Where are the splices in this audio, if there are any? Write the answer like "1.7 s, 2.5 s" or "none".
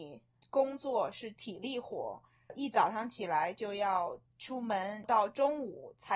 4.3 s